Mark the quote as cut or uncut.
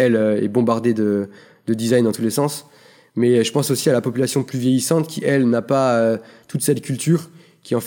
uncut